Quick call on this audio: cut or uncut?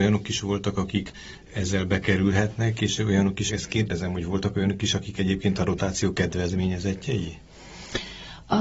cut